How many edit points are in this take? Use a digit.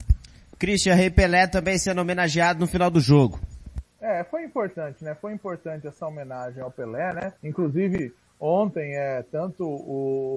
1